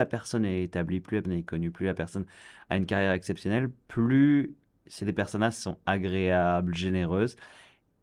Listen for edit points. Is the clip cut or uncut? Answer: cut